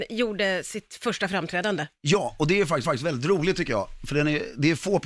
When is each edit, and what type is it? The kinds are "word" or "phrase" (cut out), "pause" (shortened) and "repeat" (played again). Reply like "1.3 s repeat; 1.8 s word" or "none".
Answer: 2.8 s repeat

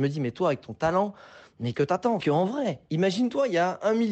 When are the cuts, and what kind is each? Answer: 1.7 s word; 2.2 s phrase

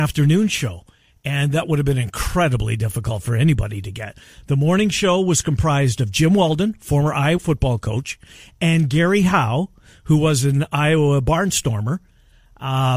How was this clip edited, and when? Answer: 7.4 s word

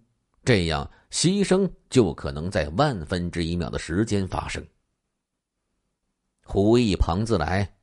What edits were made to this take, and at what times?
none

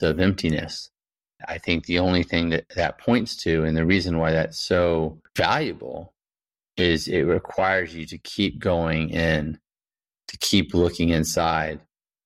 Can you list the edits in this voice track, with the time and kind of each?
5.3 s pause

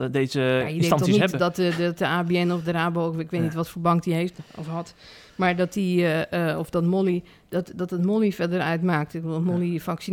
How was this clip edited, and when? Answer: none

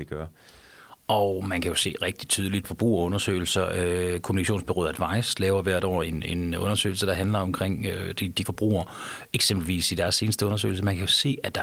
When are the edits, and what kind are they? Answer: 2.6 s phrase; 8.4 s word

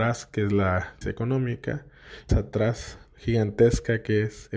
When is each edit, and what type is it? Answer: 1.0 s word; 2.3 s phrase

